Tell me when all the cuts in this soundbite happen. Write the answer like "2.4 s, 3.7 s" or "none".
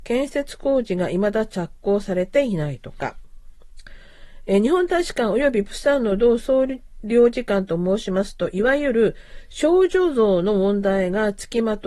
none